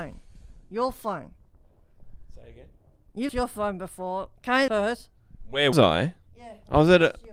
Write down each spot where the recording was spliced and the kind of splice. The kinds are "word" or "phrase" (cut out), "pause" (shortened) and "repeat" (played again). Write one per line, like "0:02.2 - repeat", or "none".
0:03.3 - word
0:04.7 - word
0:05.7 - word